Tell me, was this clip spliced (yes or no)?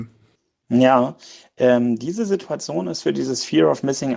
no